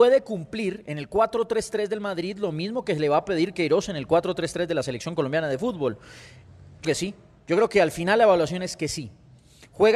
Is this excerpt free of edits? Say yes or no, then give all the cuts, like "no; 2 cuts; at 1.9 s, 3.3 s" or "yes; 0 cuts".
no; 1 cut; at 6.8 s